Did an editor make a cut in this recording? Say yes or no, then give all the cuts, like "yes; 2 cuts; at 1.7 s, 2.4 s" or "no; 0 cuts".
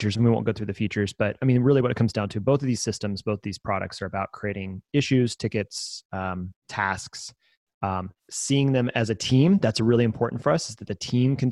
yes; 2 cuts; at 6.6 s, 8.2 s